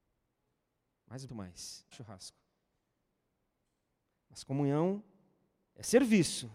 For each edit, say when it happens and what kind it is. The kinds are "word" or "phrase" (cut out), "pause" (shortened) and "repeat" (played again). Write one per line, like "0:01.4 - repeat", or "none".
0:01.3 - word
0:01.9 - phrase